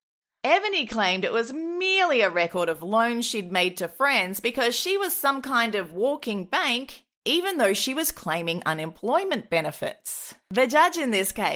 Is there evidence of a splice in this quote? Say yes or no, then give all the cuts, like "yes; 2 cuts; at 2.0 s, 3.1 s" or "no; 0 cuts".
yes; 1 cut; at 10.4 s